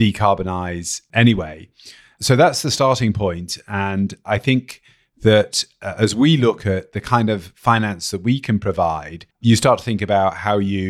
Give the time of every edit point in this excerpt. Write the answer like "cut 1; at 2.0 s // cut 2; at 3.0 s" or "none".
cut 1; at 9.3 s